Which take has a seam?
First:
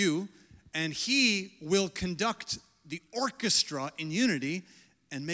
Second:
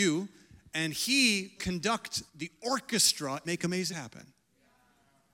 second; 4 cuts; at 1.6 s, 2.3 s, 3.4 s, 3.9 s

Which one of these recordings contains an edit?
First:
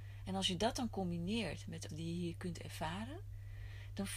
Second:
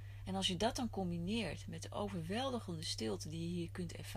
first; 1 cut; at 1.9 s

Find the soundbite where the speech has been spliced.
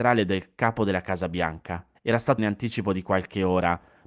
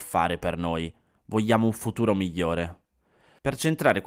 first; 2 cuts; at 1.9 s, 2.4 s

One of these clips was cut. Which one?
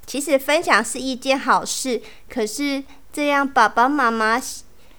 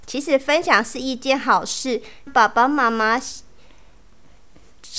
second; 1 cut; at 2.3 s

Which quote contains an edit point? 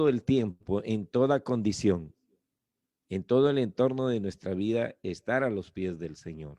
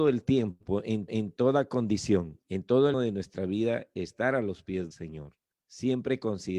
second; 5 cuts; at 1.1 s, 2.4 s, 2.9 s, 4.9 s, 5.5 s

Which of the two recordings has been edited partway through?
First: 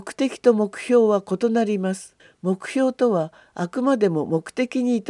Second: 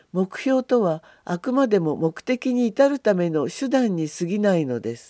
first; 1 cut; at 2.2 s

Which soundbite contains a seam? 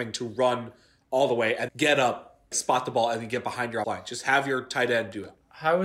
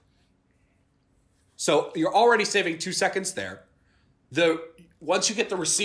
first; 3 cuts; at 1.7 s, 2.5 s, 3.8 s

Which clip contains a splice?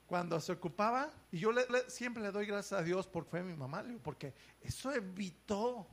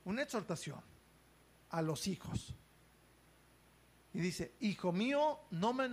first; 3 cuts; at 1.2 s, 1.7 s, 3.3 s

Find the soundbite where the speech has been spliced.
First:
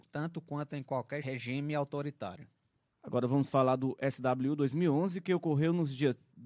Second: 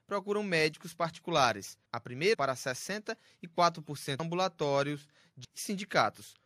second; 4 cuts; at 1.9 s, 2.3 s, 4.2 s, 5.4 s

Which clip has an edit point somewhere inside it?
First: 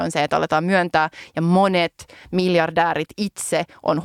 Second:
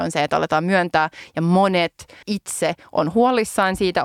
second; 1 cut; at 2.2 s

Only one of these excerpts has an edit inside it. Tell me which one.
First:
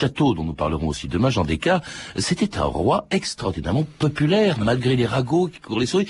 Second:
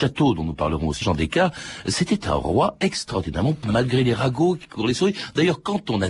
second; 2 cuts; at 1.0 s, 3.6 s

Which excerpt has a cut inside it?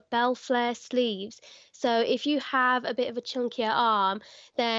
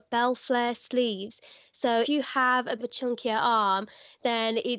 second; 2 cuts; at 2.0 s, 2.8 s

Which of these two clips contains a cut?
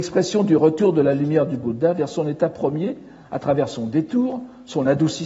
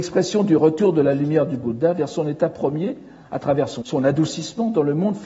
second; 1 cut; at 3.8 s

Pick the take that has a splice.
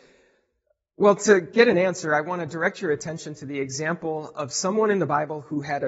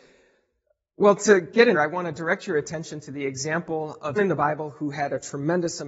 second; 2 cuts; at 1.7 s, 4.2 s

